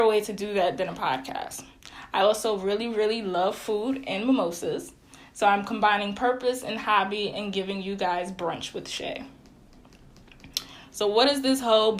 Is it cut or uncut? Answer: uncut